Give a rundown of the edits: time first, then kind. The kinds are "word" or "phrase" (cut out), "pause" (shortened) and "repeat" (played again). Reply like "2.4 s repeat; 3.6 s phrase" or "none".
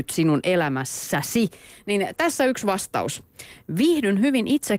none